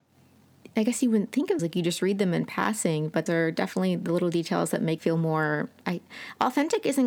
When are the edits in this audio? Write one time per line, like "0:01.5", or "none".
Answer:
0:01.6
0:03.3
0:05.0